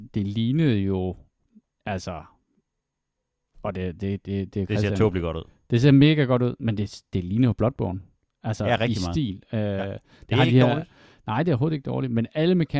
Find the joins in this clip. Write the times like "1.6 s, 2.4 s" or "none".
none